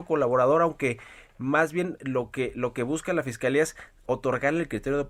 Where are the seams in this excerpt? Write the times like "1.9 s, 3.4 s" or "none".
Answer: none